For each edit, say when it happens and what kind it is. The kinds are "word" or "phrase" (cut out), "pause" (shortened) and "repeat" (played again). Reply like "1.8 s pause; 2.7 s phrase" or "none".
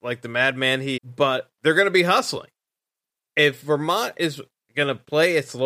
1.0 s phrase; 1.5 s pause